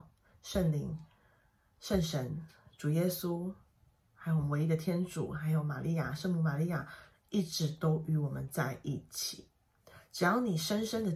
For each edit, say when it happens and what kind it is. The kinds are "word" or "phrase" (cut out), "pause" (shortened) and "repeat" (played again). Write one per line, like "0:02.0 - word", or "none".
none

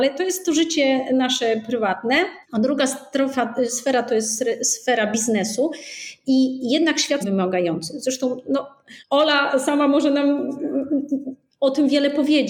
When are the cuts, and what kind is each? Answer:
0:02.4 - pause
0:07.2 - phrase
0:09.0 - pause

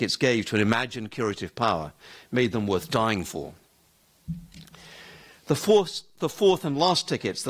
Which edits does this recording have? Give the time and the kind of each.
none

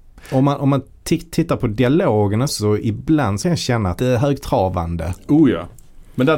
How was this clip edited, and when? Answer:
0:02.5 - word
0:03.4 - phrase
0:04.0 - phrase

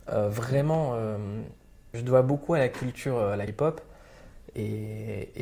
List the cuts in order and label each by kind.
0:01.9 - word
0:03.5 - word

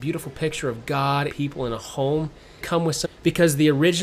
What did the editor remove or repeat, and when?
0:01.3 - word
0:02.6 - phrase
0:03.0 - word

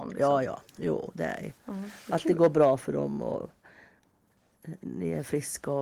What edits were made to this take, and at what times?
0:01.6 - pause

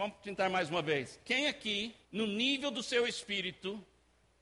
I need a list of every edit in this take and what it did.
0:02.0 - pause

